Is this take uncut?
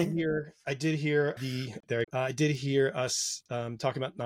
no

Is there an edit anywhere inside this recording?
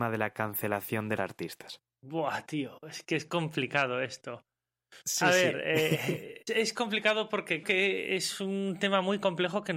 yes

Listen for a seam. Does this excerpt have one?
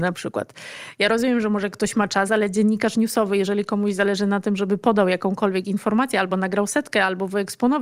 no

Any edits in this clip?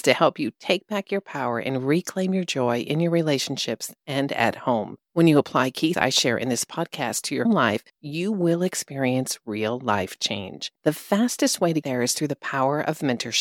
yes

